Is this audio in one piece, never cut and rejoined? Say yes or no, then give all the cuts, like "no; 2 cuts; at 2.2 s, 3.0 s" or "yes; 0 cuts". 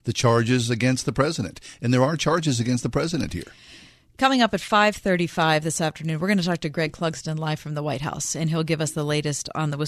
yes; 0 cuts